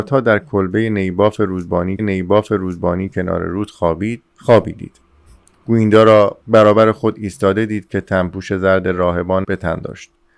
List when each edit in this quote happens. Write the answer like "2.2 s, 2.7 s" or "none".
2.0 s, 4.3 s, 6.4 s, 9.4 s